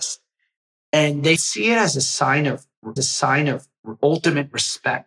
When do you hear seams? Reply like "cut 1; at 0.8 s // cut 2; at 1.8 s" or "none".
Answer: cut 1; at 1.4 s // cut 2; at 3.0 s